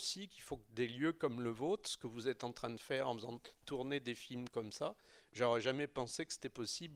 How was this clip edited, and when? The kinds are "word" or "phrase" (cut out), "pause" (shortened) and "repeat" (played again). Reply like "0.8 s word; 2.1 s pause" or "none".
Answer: none